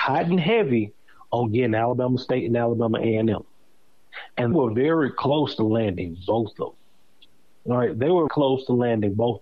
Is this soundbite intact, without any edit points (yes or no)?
no